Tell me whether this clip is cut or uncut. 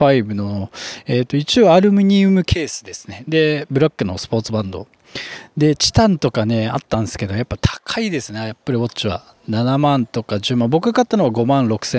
uncut